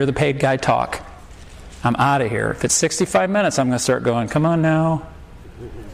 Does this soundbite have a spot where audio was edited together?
no; 0 cuts

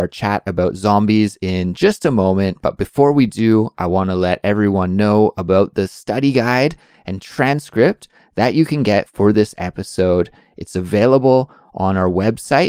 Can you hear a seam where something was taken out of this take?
no; 0 cuts

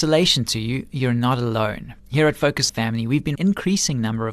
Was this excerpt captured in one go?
no; 3 cuts; at 2.0 s, 2.7 s, 3.4 s

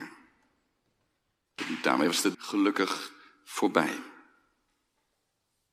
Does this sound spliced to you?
yes; 1 cut; at 2.3 s

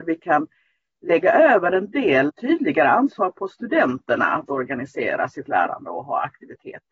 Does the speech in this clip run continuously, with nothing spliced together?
no; 1 cut; at 2.3 s

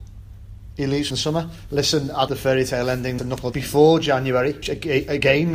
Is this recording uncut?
no; 5 cuts; at 1.1 s, 2.3 s, 3.2 s, 3.5 s, 4.6 s

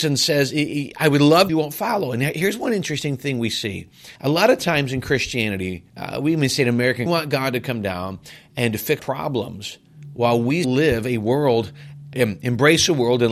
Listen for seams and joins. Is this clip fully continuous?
no; 7 cuts; at 1.5 s, 4.2 s, 5.9 s, 7.1 s, 9.0 s, 10.6 s, 12.1 s

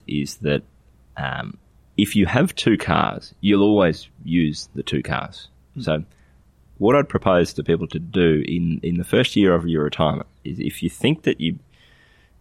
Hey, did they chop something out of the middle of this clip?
no; 0 cuts

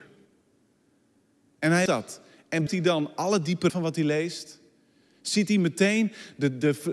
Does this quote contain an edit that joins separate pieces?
yes; 3 cuts; at 1.9 s, 2.7 s, 3.7 s

